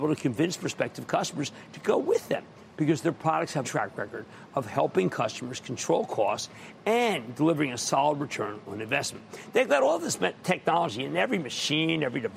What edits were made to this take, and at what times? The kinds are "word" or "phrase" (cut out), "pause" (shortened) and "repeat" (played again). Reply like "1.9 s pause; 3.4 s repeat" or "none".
3.6 s phrase